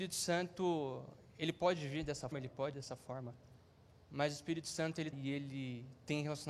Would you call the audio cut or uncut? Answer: cut